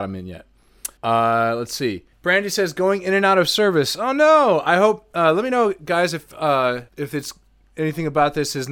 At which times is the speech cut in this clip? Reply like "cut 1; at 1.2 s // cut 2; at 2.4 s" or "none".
cut 1; at 1.0 s // cut 2; at 2.1 s // cut 3; at 6.9 s